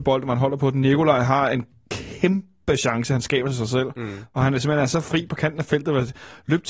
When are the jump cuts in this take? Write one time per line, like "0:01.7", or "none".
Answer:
none